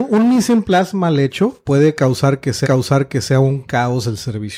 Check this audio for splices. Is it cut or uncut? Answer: cut